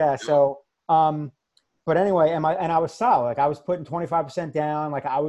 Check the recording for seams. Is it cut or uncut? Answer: uncut